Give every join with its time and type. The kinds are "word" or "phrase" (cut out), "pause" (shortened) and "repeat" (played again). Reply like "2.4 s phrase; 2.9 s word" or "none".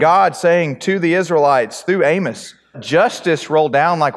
2.7 s word